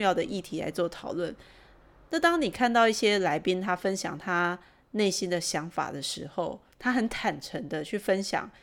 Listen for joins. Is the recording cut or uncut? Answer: cut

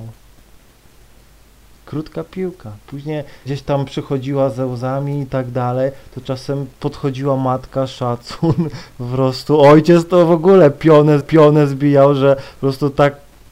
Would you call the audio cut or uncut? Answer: cut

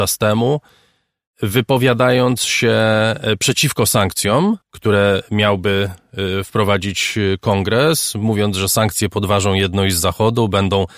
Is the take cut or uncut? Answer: cut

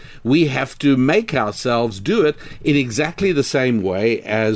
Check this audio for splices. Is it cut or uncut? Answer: uncut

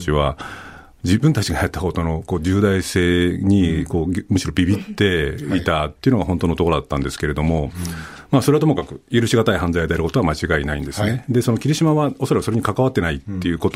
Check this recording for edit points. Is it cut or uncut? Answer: uncut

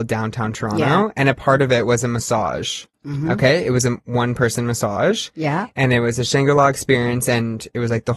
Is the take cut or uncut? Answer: cut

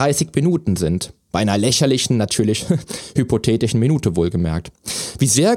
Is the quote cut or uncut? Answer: uncut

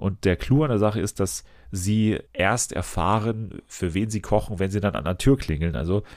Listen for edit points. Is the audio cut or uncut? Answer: cut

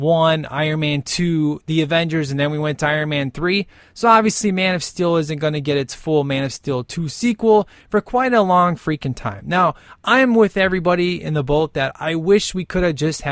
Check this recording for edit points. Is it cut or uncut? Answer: uncut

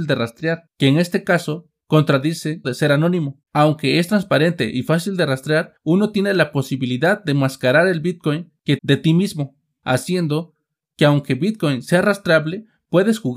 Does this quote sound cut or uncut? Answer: cut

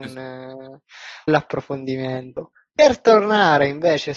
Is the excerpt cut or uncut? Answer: cut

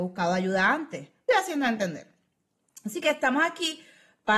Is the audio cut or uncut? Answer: cut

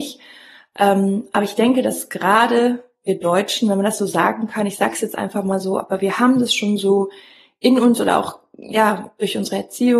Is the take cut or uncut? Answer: uncut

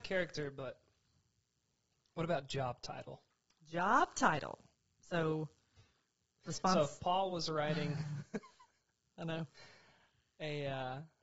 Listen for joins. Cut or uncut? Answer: uncut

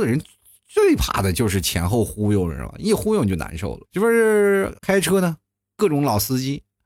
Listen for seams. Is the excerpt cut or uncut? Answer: cut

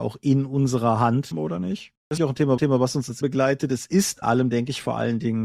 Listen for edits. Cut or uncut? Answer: cut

